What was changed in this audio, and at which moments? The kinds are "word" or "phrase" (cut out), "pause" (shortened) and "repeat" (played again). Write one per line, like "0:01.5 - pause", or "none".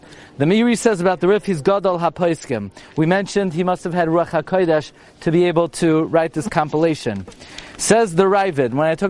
none